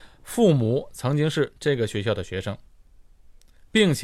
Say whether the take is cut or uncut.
uncut